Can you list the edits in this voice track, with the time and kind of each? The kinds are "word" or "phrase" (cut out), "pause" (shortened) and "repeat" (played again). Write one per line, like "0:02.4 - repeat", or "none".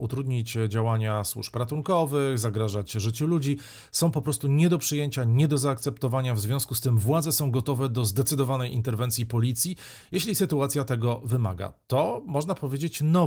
none